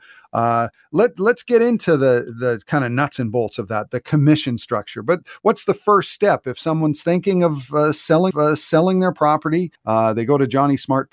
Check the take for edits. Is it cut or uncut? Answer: cut